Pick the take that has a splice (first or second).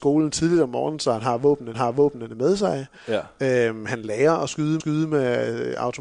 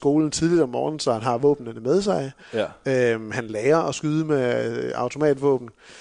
first